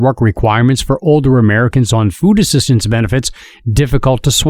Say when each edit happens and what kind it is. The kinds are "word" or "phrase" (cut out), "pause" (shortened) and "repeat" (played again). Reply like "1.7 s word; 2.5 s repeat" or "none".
none